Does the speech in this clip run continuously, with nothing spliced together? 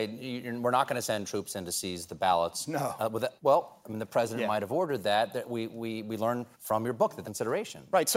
no; 3 cuts; at 3.4 s, 6.5 s, 7.2 s

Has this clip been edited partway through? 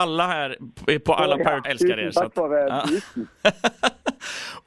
yes; 1 cut; at 1.6 s

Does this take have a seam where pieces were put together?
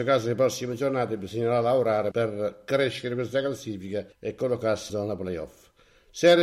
yes; 3 cuts; at 2.1 s, 4.1 s, 4.9 s

